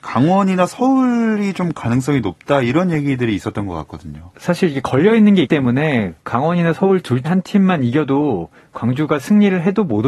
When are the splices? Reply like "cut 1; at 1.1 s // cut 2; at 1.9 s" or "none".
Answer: cut 1; at 5.4 s // cut 2; at 6.2 s // cut 3; at 7.2 s